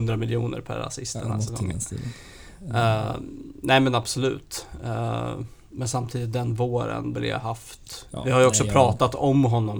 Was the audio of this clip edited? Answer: yes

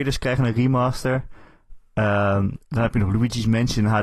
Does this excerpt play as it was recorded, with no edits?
no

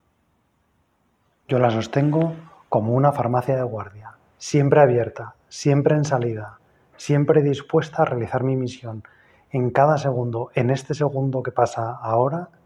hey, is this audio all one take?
yes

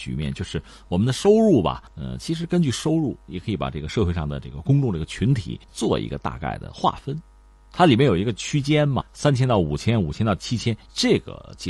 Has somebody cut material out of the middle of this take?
yes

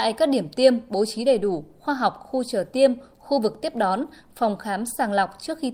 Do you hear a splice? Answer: no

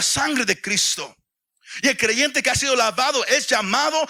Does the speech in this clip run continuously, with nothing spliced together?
yes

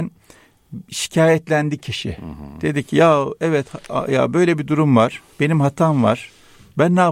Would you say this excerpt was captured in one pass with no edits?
no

